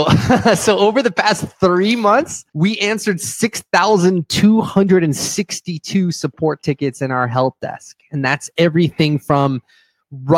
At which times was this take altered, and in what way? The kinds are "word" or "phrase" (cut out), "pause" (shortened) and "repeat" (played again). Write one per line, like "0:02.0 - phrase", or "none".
0:02.5 - pause